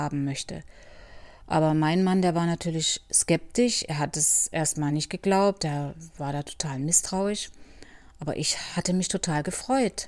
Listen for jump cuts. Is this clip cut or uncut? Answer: uncut